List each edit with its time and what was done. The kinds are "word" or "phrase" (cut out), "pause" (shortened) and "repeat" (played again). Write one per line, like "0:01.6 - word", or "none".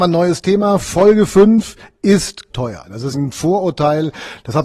0:02.5 - word
0:03.1 - word